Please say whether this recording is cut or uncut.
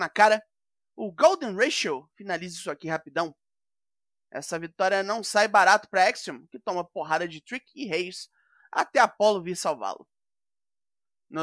uncut